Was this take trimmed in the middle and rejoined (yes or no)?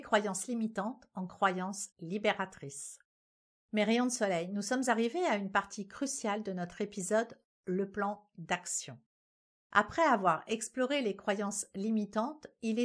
yes